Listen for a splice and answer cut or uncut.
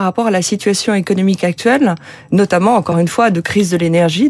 uncut